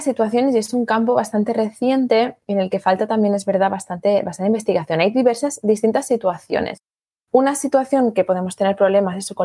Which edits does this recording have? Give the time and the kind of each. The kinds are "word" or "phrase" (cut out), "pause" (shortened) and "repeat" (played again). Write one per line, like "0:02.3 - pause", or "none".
none